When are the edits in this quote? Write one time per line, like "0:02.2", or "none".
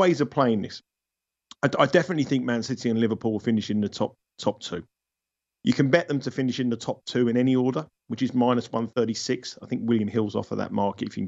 none